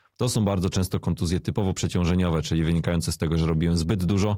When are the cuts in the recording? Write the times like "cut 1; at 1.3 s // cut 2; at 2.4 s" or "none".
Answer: none

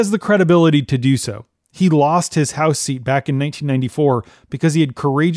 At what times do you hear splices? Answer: none

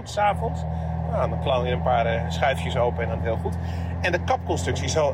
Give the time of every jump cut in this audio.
cut 1; at 3.2 s

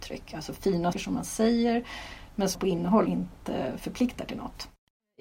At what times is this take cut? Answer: cut 1; at 0.9 s // cut 2; at 2.5 s // cut 3; at 3.1 s

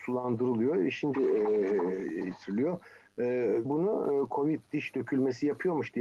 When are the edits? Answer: cut 1; at 1.1 s // cut 2; at 3.6 s

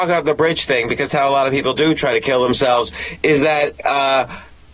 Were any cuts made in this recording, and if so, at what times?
cut 1; at 1.1 s

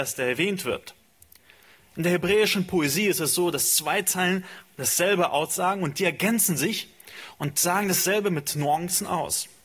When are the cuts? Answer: none

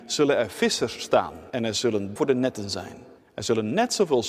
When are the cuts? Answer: cut 1; at 1.5 s // cut 2; at 2.2 s // cut 3; at 3.2 s

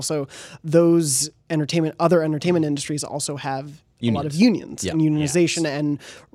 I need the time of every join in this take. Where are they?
none

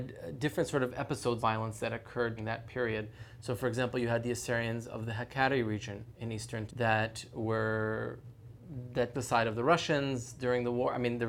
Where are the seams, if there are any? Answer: cut 1; at 1.4 s // cut 2; at 2.4 s // cut 3; at 6.7 s // cut 4; at 9.1 s

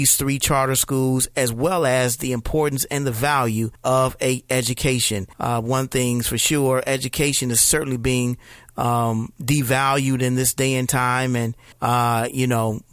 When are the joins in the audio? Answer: cut 1; at 3.8 s // cut 2; at 5.3 s // cut 3; at 11.7 s

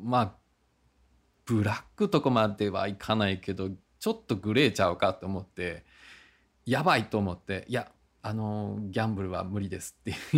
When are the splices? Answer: none

